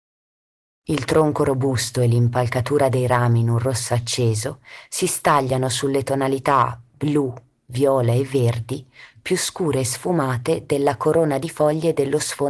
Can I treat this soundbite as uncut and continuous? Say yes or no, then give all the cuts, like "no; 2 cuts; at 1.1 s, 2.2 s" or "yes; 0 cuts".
yes; 0 cuts